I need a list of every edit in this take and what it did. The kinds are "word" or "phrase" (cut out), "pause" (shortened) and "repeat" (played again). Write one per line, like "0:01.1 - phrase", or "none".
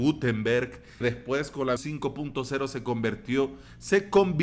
0:01.0 - word
0:01.8 - word